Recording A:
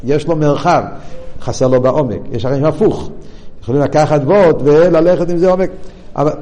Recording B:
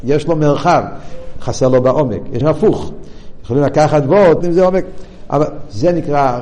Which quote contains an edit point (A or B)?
B